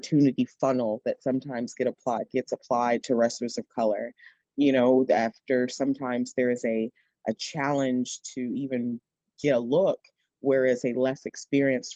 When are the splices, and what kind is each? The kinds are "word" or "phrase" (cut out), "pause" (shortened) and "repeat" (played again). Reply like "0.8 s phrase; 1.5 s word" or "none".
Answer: none

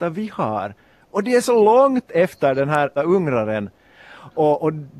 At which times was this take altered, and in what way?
3.0 s word

